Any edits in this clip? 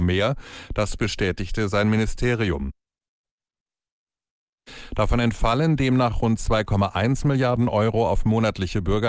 no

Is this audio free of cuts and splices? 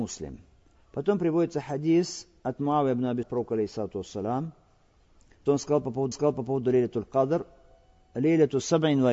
no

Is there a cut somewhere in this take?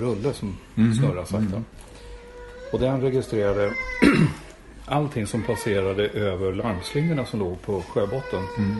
no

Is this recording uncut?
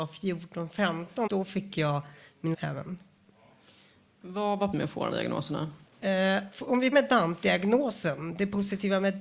no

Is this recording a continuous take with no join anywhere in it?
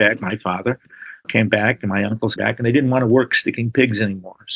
no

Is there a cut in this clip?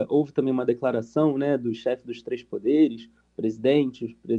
no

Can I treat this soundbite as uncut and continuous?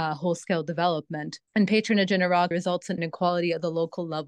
no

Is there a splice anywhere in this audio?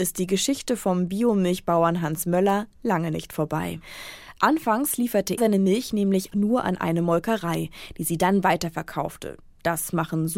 yes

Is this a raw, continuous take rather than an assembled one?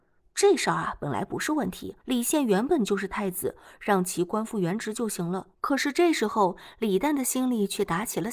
no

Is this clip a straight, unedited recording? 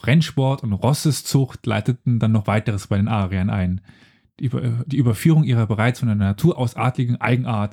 yes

